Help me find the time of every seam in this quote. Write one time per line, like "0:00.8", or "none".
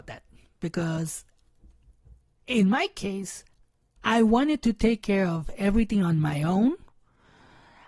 none